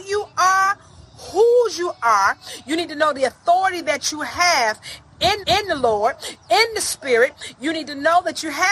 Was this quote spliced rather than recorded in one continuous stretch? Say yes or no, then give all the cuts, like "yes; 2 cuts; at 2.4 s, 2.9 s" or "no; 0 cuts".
yes; 1 cut; at 5.4 s